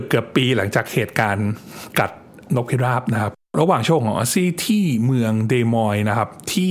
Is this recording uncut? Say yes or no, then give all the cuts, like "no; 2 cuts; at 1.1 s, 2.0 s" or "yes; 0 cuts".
no; 1 cut; at 2.4 s